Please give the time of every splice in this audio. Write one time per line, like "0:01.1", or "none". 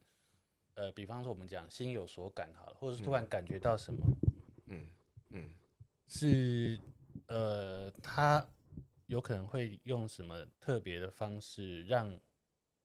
0:05.3
0:10.5